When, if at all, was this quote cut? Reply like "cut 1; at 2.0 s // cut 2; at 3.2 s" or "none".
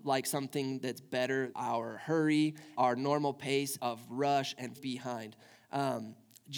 cut 1; at 1.5 s // cut 2; at 2.7 s // cut 3; at 3.8 s // cut 4; at 4.8 s